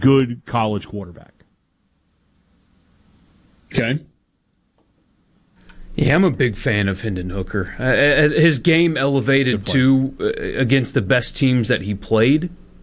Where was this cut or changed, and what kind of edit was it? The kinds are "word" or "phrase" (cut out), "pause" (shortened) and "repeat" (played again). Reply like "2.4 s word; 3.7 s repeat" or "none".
none